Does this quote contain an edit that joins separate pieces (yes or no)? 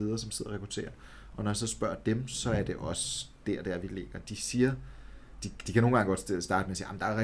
no